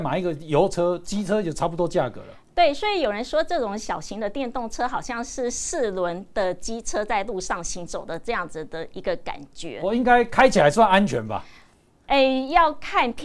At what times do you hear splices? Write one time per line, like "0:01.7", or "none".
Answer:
none